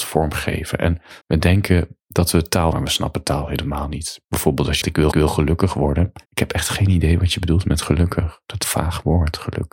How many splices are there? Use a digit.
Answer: 8